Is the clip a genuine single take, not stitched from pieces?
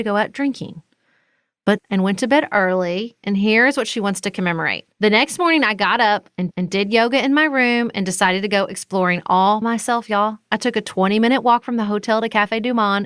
no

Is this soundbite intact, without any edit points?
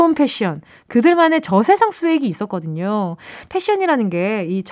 yes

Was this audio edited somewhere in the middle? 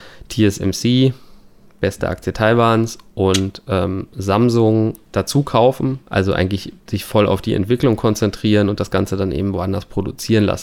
yes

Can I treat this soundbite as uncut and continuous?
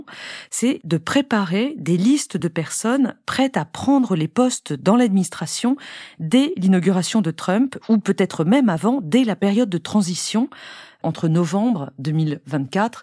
yes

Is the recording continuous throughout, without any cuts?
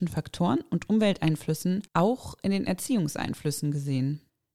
no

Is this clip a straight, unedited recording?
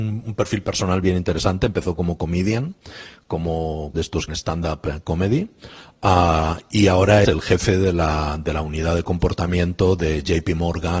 no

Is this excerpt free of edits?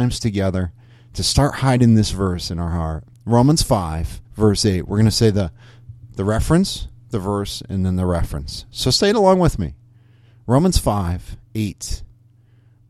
no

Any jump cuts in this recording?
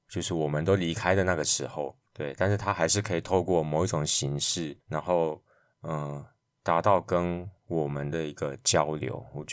yes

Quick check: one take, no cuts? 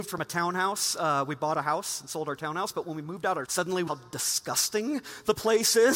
no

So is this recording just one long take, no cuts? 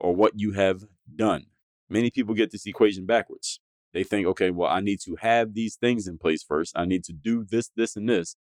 yes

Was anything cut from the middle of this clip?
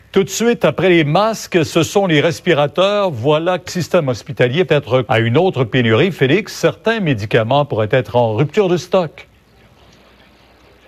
yes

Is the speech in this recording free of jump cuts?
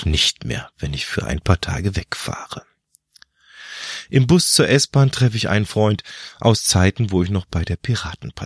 yes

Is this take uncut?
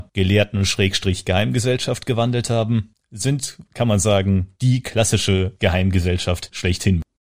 no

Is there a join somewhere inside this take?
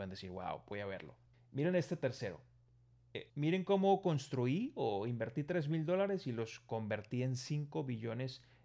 yes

